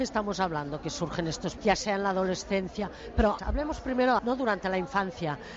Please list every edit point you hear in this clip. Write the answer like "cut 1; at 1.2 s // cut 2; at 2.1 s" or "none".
cut 1; at 1.6 s // cut 2; at 3.4 s // cut 3; at 4.2 s